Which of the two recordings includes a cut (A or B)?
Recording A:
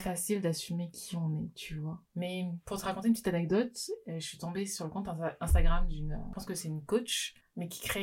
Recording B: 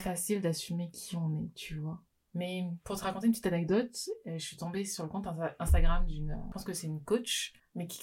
A